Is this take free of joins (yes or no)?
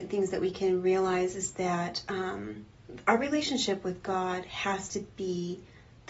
yes